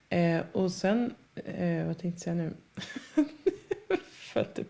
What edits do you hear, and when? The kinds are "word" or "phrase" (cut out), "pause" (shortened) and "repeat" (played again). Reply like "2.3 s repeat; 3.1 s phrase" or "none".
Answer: 1.2 s pause